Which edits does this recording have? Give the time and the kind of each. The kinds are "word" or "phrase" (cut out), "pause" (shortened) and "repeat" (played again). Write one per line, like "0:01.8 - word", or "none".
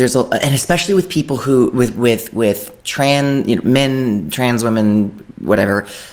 0:02.8 - pause